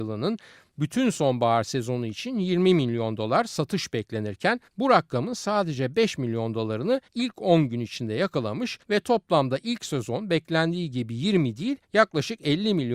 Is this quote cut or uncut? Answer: cut